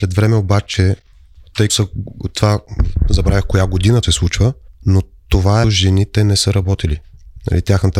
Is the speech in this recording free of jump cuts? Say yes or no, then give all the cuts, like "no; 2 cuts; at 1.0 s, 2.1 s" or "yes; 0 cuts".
no; 4 cuts; at 1.7 s, 4.0 s, 4.7 s, 5.6 s